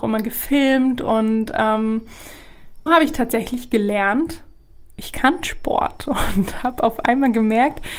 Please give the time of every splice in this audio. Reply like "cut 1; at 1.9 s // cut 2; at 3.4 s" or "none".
cut 1; at 2.9 s